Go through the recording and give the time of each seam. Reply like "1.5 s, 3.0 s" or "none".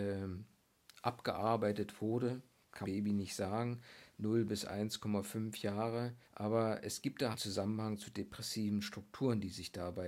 2.8 s, 6.2 s, 7.3 s